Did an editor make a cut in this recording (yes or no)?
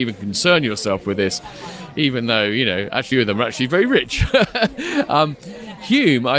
yes